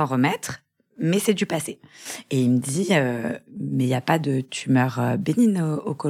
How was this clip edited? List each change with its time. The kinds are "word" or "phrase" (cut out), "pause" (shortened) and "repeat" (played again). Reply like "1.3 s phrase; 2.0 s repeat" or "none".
3.5 s pause